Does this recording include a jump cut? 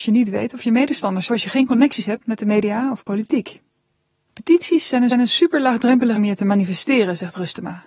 yes; 3 cuts; at 1.3 s, 5.1 s, 6.2 s

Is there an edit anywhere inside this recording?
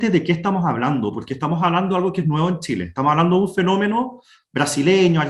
no; 0 cuts

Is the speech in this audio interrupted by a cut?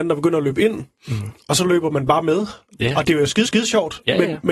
yes; 1 cut; at 3.5 s

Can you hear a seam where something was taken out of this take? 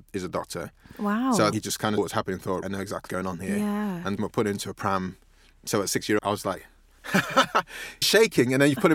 yes; 7 cuts; at 1.5 s, 2.0 s, 2.6 s, 3.1 s, 4.2 s, 6.2 s, 8.0 s

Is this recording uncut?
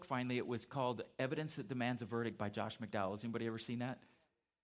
yes; 0 cuts

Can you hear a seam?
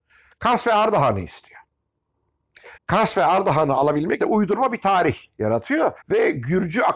yes; 3 cuts; at 2.8 s, 4.2 s, 6.0 s

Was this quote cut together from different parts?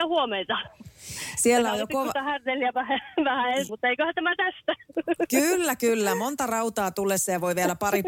yes; 1 cut; at 3.7 s

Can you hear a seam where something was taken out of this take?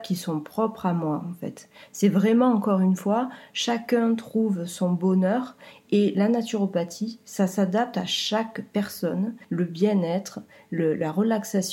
yes; 1 cut; at 9.4 s

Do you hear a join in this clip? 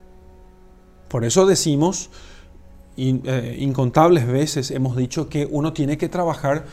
no; 0 cuts

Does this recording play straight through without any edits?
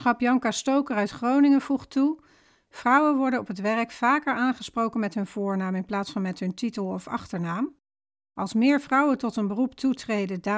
yes; 0 cuts

